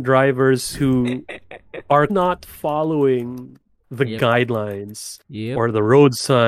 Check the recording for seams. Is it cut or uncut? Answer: cut